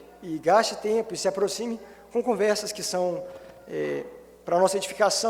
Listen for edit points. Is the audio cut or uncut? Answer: uncut